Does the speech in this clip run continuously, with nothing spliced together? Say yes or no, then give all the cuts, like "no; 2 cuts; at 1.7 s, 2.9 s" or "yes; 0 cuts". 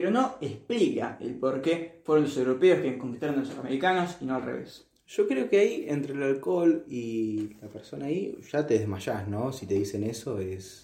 yes; 0 cuts